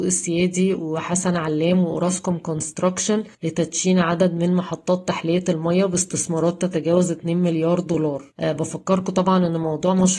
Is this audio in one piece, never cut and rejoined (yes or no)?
no